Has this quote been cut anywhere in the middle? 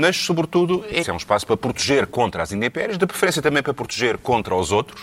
yes; 1 cut; at 1.0 s

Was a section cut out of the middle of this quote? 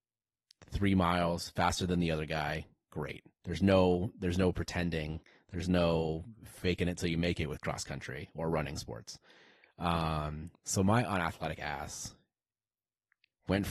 no; 0 cuts

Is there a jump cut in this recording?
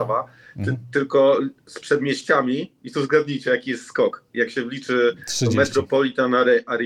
no; 0 cuts

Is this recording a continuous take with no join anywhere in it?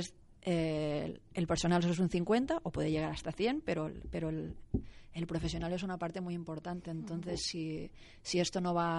yes; 0 cuts

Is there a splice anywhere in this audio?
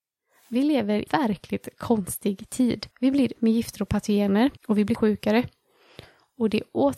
yes; 5 cuts; at 1.1 s, 2.9 s, 3.4 s, 4.6 s, 5.0 s

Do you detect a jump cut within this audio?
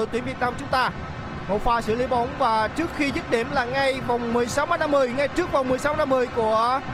no; 0 cuts

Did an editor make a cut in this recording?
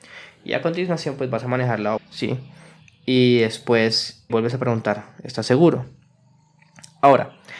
yes; 2 cuts; at 2.0 s, 4.3 s

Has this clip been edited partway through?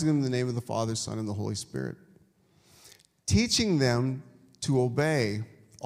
no; 0 cuts

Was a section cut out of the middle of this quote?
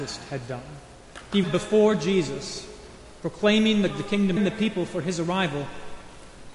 yes; 3 cuts; at 1.4 s, 3.9 s, 4.4 s

